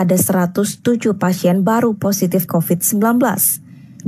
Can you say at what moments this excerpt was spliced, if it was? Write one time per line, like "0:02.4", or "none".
0:02.5